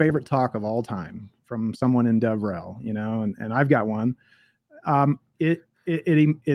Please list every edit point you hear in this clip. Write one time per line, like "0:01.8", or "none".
none